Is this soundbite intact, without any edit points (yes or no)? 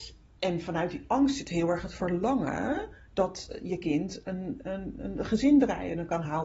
yes